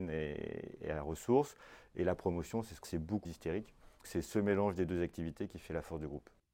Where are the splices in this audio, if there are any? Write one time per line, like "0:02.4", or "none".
0:02.8
0:03.2
0:04.0